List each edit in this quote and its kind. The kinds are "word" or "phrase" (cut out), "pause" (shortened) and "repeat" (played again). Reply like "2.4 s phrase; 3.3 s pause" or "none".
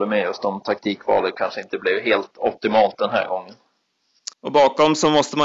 4.3 s pause